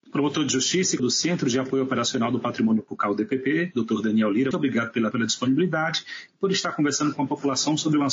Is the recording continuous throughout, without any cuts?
no; 4 cuts; at 1.0 s, 2.9 s, 4.5 s, 5.1 s

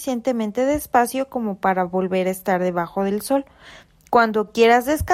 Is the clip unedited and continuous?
yes; 0 cuts

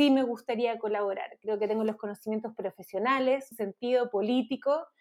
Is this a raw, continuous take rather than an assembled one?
no; 1 cut; at 3.5 s

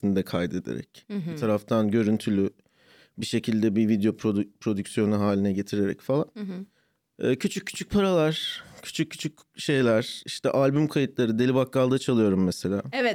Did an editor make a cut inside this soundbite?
no; 0 cuts

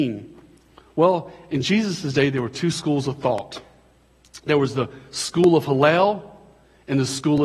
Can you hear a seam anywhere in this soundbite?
no; 0 cuts

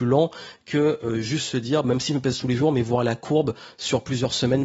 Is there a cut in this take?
no; 0 cuts

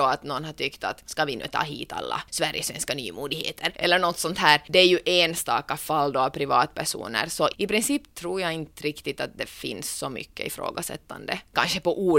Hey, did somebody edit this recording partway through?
no; 0 cuts

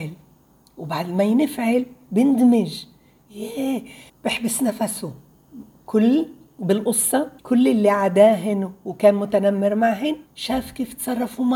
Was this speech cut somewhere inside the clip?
yes; 3 cuts; at 4.1 s, 7.4 s, 10.3 s

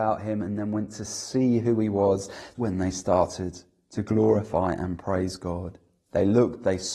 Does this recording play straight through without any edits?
no; 1 cut; at 2.5 s

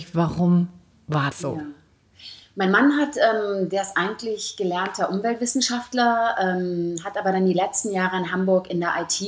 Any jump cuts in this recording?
yes; 1 cut; at 1.3 s

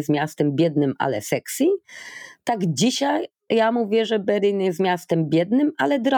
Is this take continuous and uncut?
yes; 0 cuts

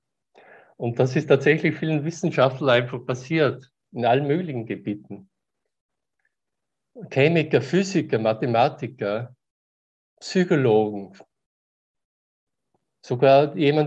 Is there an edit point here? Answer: no; 0 cuts

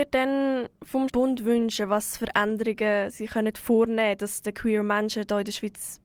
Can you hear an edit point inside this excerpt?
yes; 1 cut; at 1.1 s

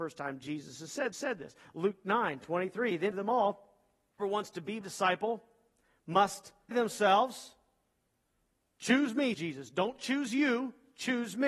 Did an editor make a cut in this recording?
yes; 6 cuts; at 1.1 s, 3.1 s, 4.2 s, 4.8 s, 6.7 s, 9.3 s

